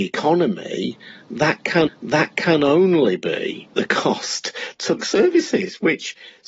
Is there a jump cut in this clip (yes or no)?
yes